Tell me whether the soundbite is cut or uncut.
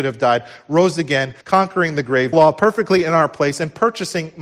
cut